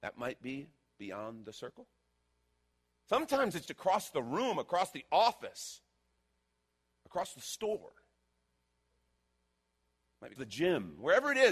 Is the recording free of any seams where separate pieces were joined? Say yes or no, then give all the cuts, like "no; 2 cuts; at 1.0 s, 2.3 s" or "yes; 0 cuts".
no; 2 cuts; at 3.7 s, 10.4 s